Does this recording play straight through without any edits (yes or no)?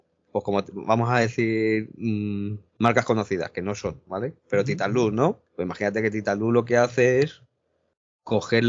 no